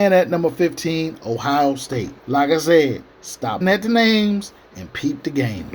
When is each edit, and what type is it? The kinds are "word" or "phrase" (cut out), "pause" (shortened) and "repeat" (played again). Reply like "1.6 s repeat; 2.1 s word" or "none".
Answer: 2.2 s pause; 3.6 s word